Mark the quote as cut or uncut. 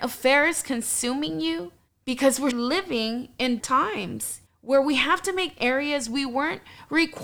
cut